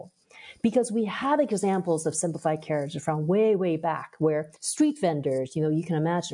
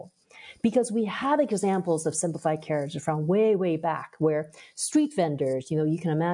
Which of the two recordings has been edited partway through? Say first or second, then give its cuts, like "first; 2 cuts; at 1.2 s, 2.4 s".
first; 1 cut; at 4.6 s